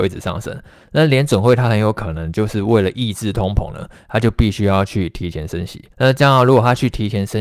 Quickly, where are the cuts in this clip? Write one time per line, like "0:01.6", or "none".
0:05.9